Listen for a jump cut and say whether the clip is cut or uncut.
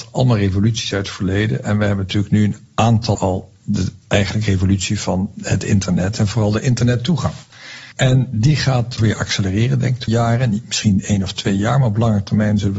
cut